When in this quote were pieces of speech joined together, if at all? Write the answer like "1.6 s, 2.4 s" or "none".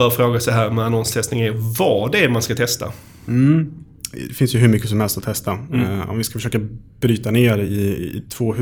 none